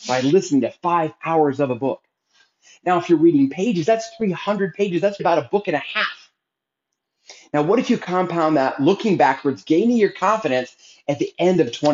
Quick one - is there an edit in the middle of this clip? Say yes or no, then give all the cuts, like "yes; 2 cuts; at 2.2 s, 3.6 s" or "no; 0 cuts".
yes; 1 cut; at 5.2 s